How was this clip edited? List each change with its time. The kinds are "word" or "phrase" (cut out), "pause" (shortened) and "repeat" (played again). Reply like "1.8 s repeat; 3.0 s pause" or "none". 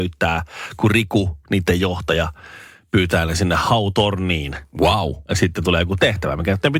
none